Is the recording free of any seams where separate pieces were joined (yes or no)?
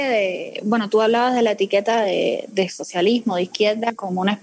yes